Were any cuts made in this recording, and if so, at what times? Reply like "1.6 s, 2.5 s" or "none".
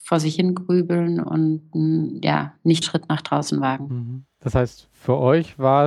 2.8 s, 4.3 s